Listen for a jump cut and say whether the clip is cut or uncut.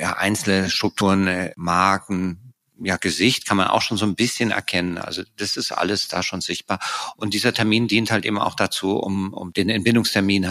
uncut